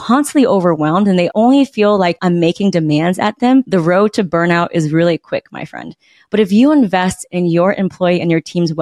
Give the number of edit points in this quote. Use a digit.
0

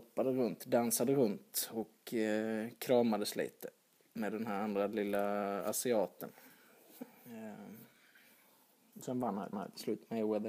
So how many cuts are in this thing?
1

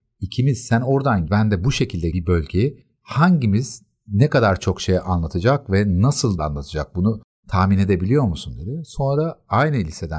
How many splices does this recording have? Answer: 3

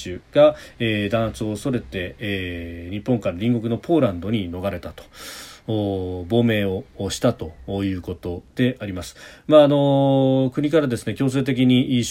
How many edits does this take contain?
0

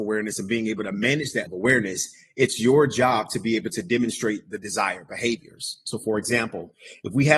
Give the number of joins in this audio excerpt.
1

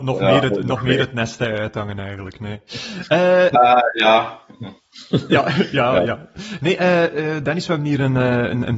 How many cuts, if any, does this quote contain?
0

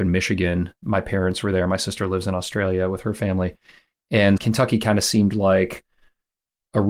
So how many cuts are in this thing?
1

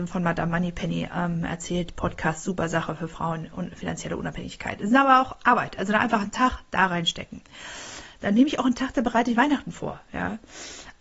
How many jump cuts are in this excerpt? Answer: 0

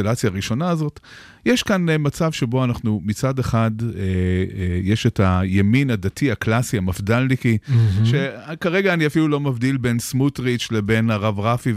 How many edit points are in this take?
0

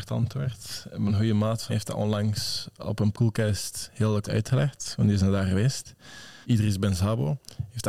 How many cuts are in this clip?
5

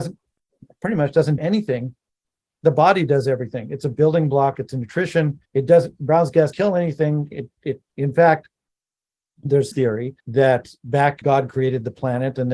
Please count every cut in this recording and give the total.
7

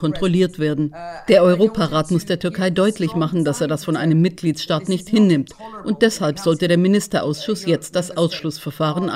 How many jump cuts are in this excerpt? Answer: 0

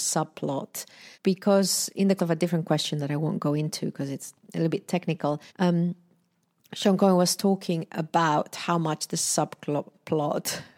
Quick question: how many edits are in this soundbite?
3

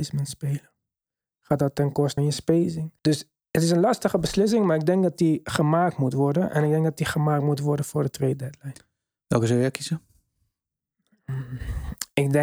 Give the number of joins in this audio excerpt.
2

